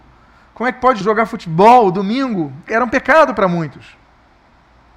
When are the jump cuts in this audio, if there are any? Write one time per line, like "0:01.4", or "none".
0:01.0
0:02.7